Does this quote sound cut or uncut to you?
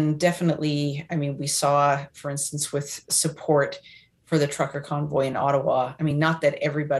uncut